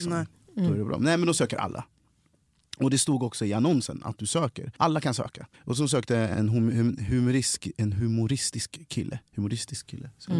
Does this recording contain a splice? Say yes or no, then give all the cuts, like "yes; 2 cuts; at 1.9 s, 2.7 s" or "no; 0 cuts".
yes; 3 cuts; at 4.7 s, 5.5 s, 6.3 s